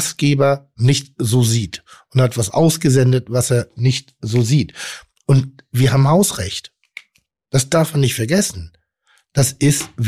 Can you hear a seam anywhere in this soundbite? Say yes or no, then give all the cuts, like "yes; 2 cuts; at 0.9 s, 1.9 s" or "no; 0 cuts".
no; 0 cuts